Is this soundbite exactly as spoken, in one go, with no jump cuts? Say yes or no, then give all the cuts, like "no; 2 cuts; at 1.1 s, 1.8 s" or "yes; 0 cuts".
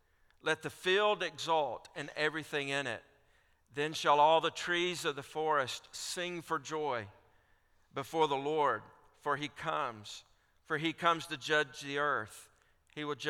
yes; 0 cuts